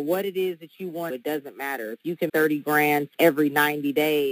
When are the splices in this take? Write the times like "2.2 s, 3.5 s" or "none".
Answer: 1.1 s, 2.3 s, 3.1 s